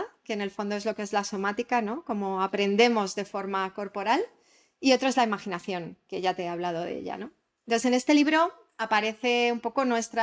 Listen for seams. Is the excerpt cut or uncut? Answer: uncut